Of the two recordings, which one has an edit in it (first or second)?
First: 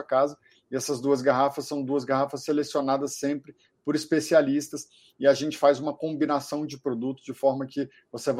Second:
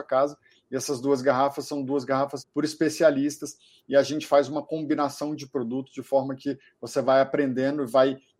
second